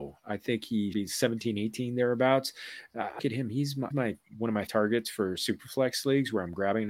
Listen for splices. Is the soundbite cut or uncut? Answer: cut